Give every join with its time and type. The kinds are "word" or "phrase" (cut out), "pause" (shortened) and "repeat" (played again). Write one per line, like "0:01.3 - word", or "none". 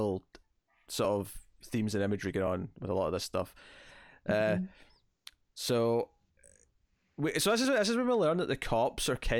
none